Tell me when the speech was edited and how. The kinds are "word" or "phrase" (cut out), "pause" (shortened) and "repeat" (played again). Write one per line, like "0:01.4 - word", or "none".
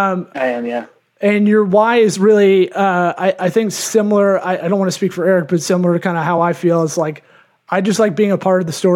none